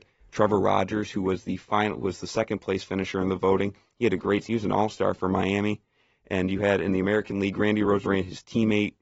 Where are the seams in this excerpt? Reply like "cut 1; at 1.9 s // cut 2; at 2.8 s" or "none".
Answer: none